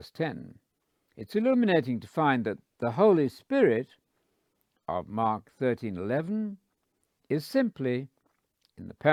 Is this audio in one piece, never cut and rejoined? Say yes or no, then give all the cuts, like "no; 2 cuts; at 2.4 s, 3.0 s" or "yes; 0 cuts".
yes; 0 cuts